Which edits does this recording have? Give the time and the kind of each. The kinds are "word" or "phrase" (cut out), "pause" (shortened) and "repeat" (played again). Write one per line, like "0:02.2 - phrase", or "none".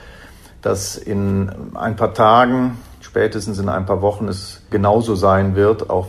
0:04.7 - word

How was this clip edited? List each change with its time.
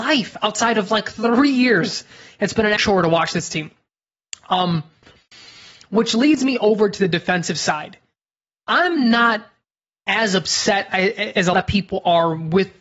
0:02.8 - word
0:11.5 - word

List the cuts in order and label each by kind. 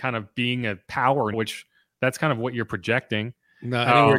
0:01.3 - word

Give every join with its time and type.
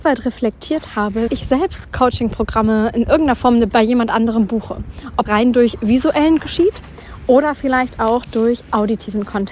0:01.3 - word
0:01.8 - word
0:03.7 - word
0:05.3 - word
0:06.4 - word

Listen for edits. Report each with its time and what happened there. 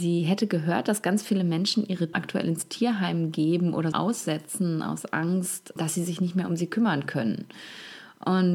0:02.1 - word
0:03.9 - word
0:05.8 - word

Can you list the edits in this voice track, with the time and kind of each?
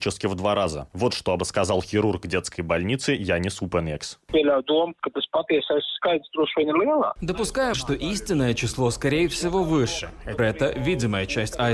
0:01.4 - word
0:07.7 - word
0:10.4 - word

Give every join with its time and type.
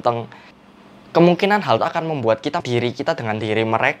0:01.8 - word
0:02.6 - word

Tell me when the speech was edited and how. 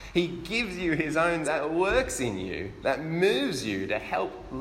0:01.4 - word

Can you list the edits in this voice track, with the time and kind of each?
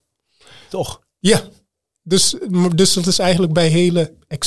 none

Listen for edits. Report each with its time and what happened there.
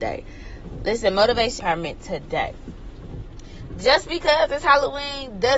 0:01.6 - word

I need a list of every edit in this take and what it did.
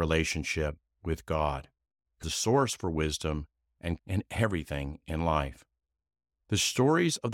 0:02.2 - word
0:04.0 - word

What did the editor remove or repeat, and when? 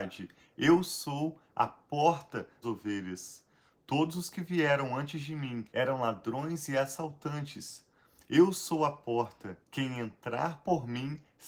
0:02.6 - word
0:05.7 - pause
0:09.6 - pause

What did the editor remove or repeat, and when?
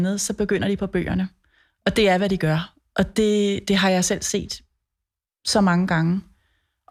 none

